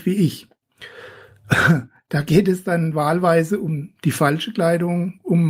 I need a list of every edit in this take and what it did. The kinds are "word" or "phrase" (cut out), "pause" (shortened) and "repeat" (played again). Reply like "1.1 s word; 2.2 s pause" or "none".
none